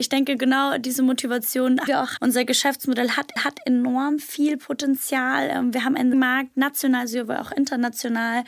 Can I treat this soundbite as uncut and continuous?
no; 4 cuts; at 1.9 s, 2.2 s, 3.4 s, 6.1 s

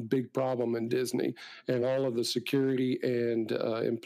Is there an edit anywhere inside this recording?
no; 0 cuts

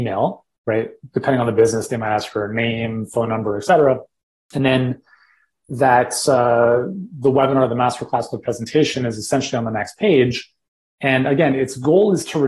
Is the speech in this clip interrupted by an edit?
no; 0 cuts

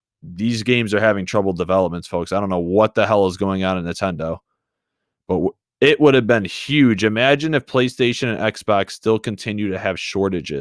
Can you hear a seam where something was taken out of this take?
no; 0 cuts

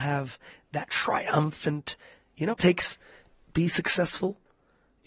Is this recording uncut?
no; 2 cuts; at 2.5 s, 3.3 s

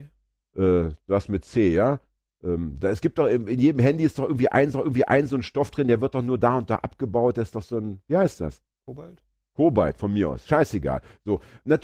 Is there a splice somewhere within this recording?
yes; 1 cut; at 4.7 s

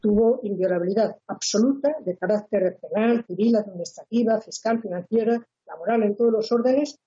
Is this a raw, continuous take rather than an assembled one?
yes; 0 cuts

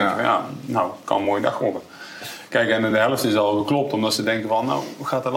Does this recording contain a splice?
no; 0 cuts

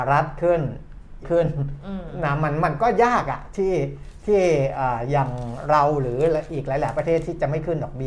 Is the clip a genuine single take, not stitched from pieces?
no; 1 cut; at 1.2 s

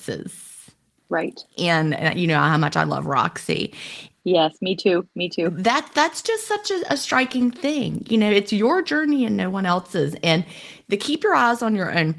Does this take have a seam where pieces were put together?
no; 0 cuts

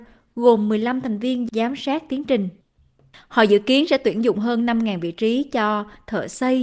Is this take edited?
no; 0 cuts

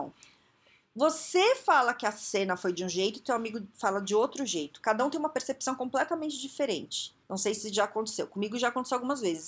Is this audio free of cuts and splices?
no; 1 cut; at 7.2 s

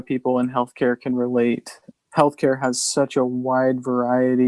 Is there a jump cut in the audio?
no; 0 cuts

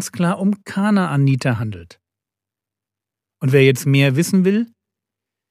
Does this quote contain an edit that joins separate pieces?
no; 0 cuts

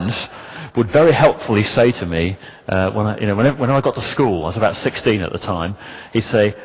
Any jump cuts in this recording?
no; 0 cuts

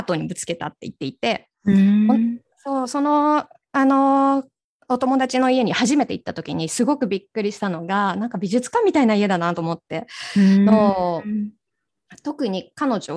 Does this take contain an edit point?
no; 0 cuts

